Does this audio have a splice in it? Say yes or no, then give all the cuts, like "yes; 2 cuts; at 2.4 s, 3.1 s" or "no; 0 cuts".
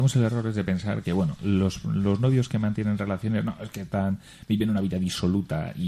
no; 0 cuts